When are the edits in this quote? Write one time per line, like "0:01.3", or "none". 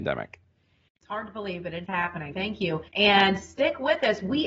0:01.8
0:02.3
0:02.9